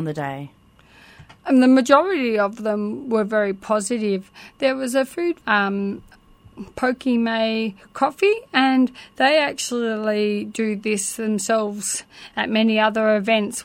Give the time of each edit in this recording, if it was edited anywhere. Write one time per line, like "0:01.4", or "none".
0:01.4
0:05.4